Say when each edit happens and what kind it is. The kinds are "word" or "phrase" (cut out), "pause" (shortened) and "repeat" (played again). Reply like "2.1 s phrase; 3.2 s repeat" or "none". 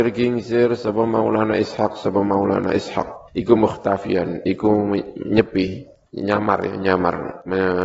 3.3 s pause; 6.1 s pause